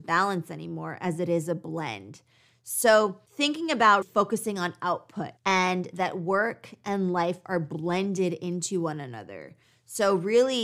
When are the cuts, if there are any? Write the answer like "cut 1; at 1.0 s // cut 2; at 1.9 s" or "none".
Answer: cut 1; at 3.3 s // cut 2; at 4.0 s // cut 3; at 5.4 s